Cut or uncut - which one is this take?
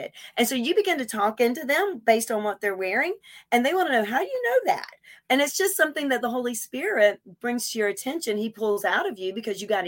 uncut